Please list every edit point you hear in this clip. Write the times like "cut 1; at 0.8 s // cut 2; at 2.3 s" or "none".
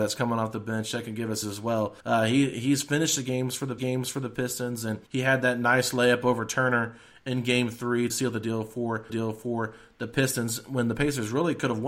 cut 1; at 1.4 s // cut 2; at 2.0 s // cut 3; at 3.8 s // cut 4; at 5.1 s // cut 5; at 8.1 s // cut 6; at 9.1 s

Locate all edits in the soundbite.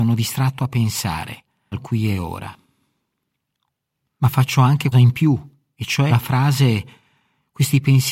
cut 1; at 1.7 s // cut 2; at 4.9 s // cut 3; at 6.1 s

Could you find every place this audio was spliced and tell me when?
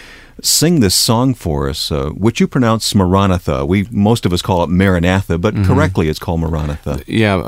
none

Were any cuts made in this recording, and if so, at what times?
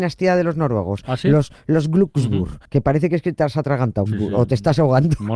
cut 1; at 2.7 s // cut 2; at 4.1 s

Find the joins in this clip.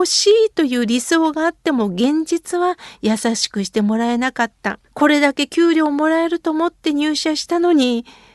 cut 1; at 4.9 s

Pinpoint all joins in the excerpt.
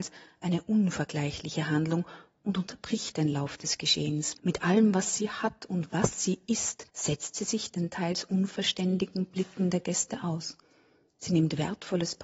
cut 1; at 4.4 s // cut 2; at 6.9 s

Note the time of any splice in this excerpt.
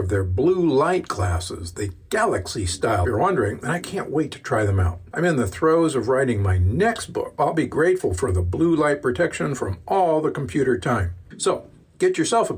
cut 1; at 3.0 s // cut 2; at 7.4 s

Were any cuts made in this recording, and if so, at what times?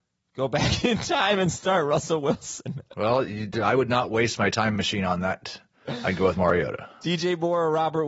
none

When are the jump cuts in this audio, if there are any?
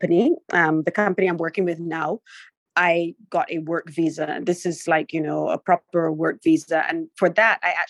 none

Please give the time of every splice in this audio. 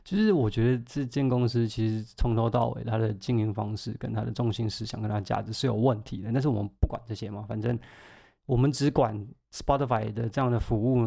none

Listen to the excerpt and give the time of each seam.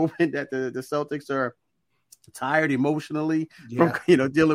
none

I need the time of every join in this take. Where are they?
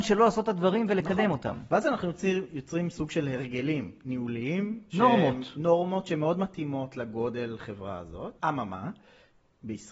cut 1; at 8.4 s

